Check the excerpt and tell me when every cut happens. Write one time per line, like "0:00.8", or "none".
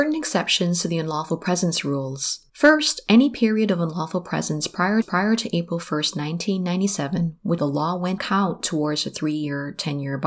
0:02.5
0:05.0
0:07.6
0:08.2